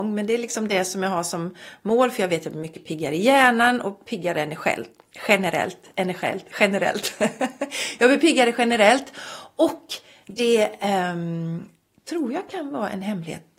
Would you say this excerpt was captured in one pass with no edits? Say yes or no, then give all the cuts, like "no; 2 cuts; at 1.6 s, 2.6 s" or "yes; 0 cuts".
yes; 0 cuts